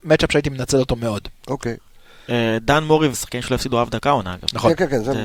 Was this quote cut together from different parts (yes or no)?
yes